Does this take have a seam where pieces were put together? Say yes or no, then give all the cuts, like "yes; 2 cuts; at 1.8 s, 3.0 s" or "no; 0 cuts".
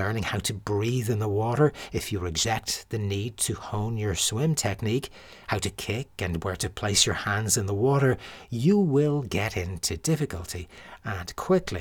no; 0 cuts